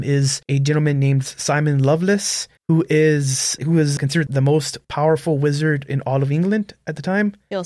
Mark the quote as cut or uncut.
cut